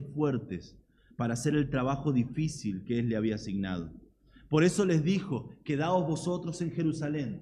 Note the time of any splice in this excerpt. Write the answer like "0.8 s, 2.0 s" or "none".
none